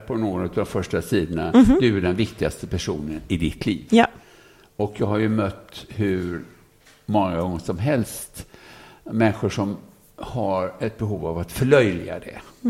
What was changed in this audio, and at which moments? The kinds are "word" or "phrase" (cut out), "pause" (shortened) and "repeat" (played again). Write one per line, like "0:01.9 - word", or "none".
none